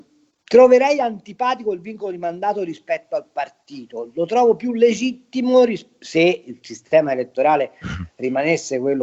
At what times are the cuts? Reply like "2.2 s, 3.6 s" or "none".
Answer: none